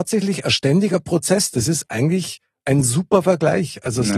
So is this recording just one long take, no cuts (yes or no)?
yes